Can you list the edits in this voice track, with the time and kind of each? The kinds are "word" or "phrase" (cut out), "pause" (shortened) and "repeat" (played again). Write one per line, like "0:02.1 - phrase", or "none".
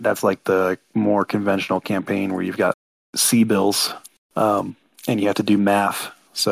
none

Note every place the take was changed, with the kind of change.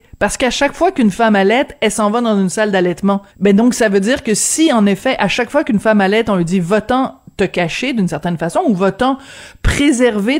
0:03.3 - pause

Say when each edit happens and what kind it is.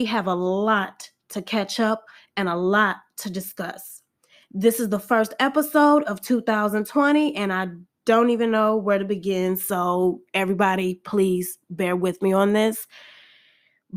none

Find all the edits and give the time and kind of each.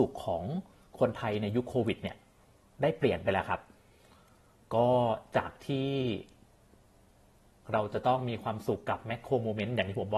none

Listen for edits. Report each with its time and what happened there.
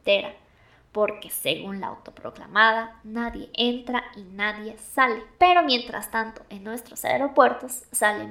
none

